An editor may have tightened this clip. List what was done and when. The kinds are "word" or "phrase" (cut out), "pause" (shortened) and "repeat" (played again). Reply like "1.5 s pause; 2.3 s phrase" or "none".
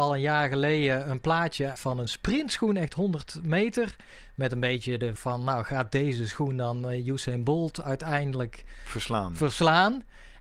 1.8 s word; 5.2 s word

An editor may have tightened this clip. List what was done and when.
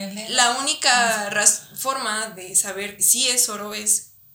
3.0 s word

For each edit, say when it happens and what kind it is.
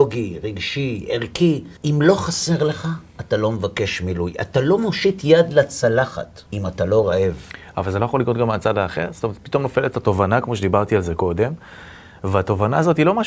1.8 s pause; 6.5 s pause

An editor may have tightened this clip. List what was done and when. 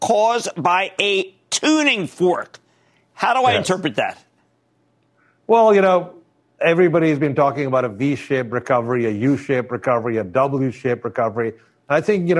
none

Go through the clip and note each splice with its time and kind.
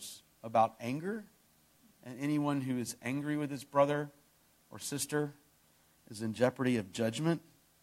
none

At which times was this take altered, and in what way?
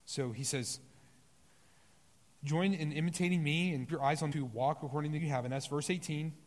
3.9 s word; 4.3 s word; 5.2 s word

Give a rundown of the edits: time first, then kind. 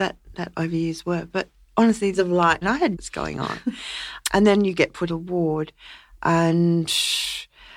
2.1 s phrase; 2.6 s phrase; 2.9 s phrase; 4.2 s word; 5.1 s word

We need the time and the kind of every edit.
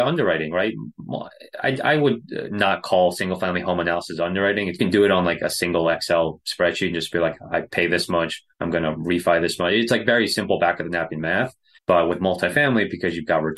4.8 s phrase; 8.5 s pause; 11.8 s pause

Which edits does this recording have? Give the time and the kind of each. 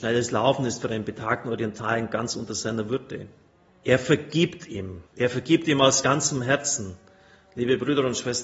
3.7 s pause; 5.1 s pause

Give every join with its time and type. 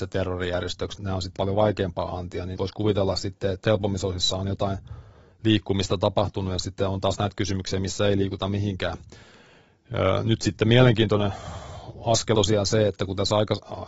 1.0 s word; 1.4 s word; 2.6 s word; 3.6 s word; 12.3 s word

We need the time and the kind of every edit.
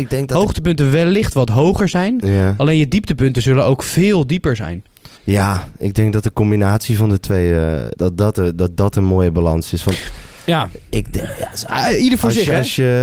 5.2 s pause; 7.9 s word

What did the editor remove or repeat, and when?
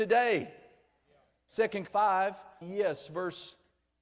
1.9 s word; 2.6 s word

